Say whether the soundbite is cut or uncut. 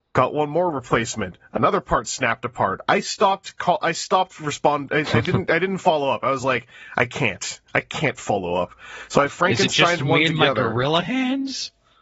uncut